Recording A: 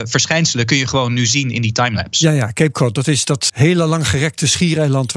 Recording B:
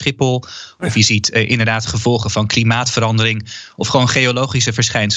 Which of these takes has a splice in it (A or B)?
A